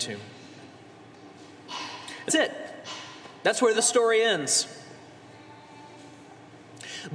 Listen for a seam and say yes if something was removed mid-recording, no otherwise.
yes